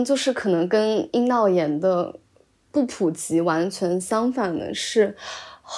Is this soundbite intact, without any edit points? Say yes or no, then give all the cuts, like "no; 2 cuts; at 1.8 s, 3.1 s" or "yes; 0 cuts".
yes; 0 cuts